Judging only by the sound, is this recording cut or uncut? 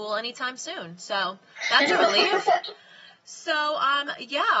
uncut